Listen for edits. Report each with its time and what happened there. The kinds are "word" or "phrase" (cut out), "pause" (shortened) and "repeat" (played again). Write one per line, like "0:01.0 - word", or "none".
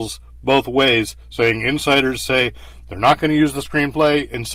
none